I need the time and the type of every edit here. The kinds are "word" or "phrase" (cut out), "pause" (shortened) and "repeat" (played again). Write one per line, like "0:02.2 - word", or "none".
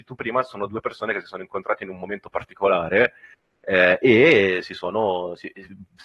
none